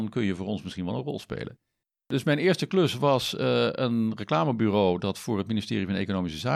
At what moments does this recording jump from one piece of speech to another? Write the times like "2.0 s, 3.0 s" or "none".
none